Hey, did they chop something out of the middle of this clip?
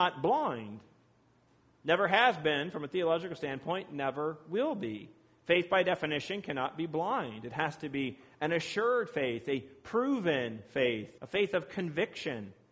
yes; 1 cut; at 11.2 s

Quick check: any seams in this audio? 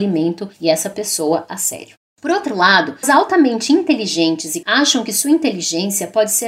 yes; 2 cuts; at 3.0 s, 4.6 s

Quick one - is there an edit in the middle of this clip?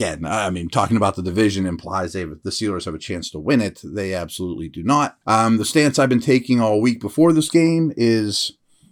yes; 1 cut; at 5.2 s

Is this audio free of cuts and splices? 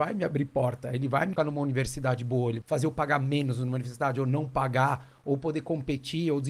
no; 2 cuts; at 1.4 s, 2.6 s

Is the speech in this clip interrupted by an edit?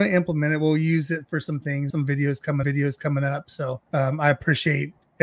yes; 3 cuts; at 1.9 s, 2.6 s, 3.8 s

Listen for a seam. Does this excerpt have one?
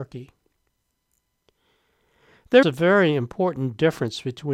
yes; 1 cut; at 2.6 s

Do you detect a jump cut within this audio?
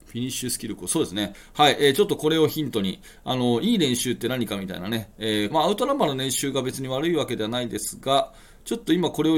yes; 1 cut; at 5.5 s

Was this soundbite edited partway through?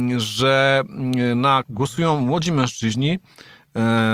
yes; 1 cut; at 1.6 s

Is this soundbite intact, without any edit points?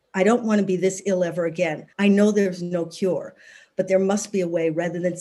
no; 1 cut; at 1.9 s

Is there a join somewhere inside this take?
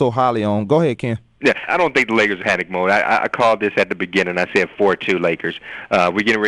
yes; 2 cuts; at 1.7 s, 2.4 s

